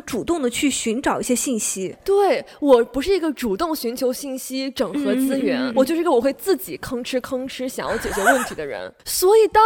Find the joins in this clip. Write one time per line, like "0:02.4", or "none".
0:05.7